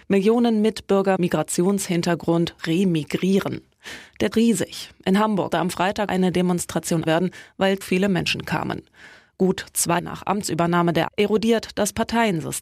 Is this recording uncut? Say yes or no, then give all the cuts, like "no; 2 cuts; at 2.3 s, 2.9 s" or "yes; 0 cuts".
no; 9 cuts; at 1.2 s, 2.6 s, 4.3 s, 5.5 s, 6.1 s, 7.1 s, 7.8 s, 10.0 s, 11.1 s